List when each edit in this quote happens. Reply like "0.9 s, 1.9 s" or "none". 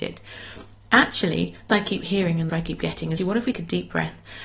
1.7 s, 2.5 s, 3.2 s, 3.5 s